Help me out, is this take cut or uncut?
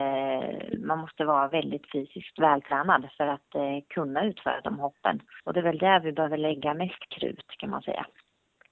cut